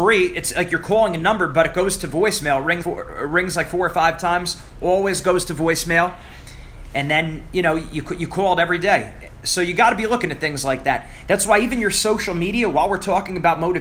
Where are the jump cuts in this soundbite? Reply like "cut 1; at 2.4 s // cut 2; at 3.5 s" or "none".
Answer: cut 1; at 2.8 s